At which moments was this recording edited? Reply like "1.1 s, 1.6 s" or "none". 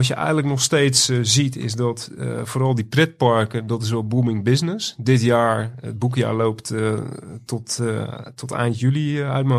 none